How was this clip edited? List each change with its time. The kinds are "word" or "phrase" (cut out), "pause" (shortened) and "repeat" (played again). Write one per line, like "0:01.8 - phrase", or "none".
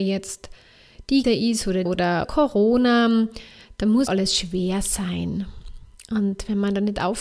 0:01.2 - word
0:01.9 - word
0:02.2 - word
0:04.1 - word